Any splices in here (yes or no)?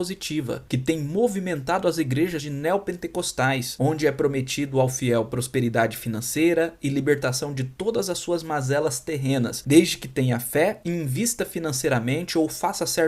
yes